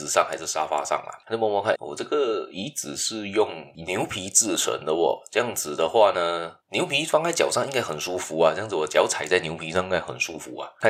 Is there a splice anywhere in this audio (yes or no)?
yes